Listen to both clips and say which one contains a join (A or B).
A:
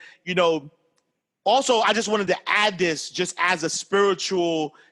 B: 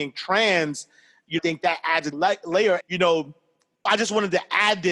B